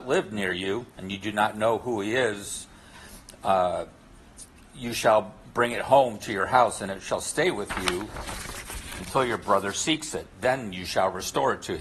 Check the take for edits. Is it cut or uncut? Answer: cut